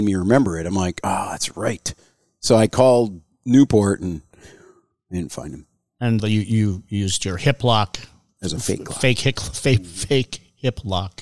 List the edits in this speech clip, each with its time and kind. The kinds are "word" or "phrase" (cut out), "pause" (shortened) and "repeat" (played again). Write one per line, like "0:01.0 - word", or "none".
0:06.2 - word